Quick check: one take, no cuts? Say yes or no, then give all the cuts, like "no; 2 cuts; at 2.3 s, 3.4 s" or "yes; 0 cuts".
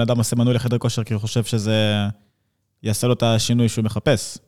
yes; 0 cuts